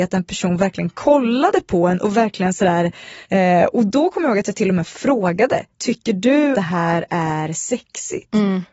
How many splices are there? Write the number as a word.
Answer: three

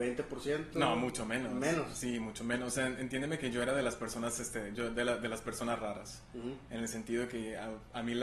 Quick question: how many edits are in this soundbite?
zero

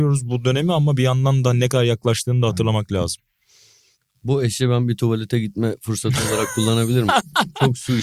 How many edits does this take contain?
zero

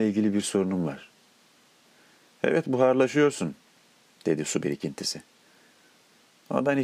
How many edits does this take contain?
zero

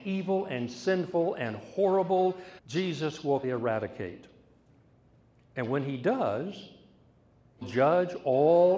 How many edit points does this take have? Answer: three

